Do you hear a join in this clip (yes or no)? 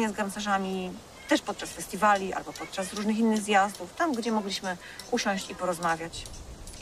no